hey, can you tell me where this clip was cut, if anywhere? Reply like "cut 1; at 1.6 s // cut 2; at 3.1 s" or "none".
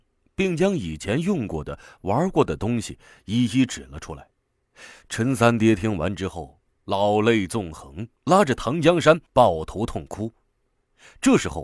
cut 1; at 8.2 s // cut 2; at 9.3 s